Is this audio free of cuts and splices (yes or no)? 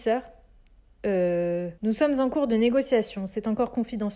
no